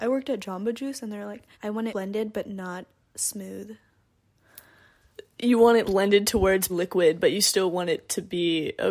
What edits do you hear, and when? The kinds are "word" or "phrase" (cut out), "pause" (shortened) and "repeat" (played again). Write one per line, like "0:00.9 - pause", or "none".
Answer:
0:01.5 - pause
0:01.9 - phrase
0:05.8 - word
0:06.7 - word